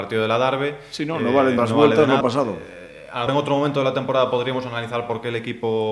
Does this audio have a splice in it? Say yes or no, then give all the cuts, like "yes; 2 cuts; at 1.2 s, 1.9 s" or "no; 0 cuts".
yes; 3 cuts; at 1.6 s, 2.2 s, 3.3 s